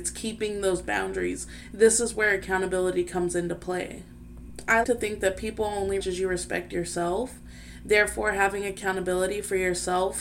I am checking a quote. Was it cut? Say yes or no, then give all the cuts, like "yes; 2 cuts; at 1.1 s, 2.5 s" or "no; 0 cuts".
yes; 2 cuts; at 4.8 s, 6.0 s